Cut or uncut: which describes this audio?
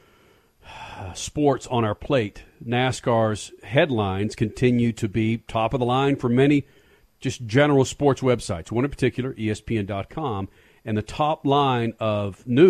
uncut